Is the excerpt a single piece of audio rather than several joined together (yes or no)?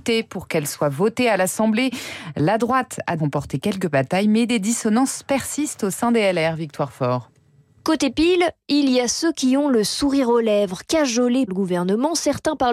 no